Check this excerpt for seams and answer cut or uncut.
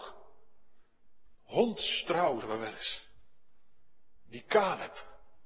cut